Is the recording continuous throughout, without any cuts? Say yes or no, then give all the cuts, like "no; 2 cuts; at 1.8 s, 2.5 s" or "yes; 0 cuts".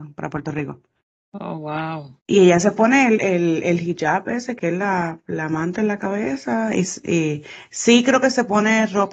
no; 1 cut; at 2.2 s